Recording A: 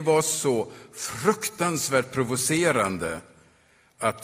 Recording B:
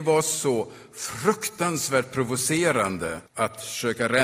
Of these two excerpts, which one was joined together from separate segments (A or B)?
B